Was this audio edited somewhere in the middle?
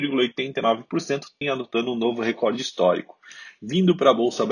yes; 1 cut; at 1.4 s

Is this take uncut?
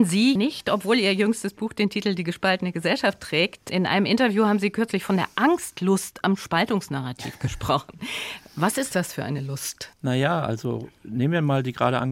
no; 1 cut; at 9.9 s

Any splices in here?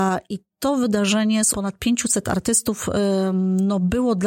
yes; 1 cut; at 1.5 s

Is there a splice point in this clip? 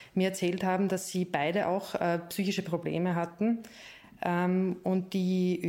no; 0 cuts

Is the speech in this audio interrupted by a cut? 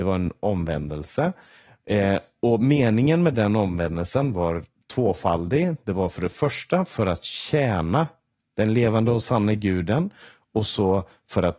no; 0 cuts

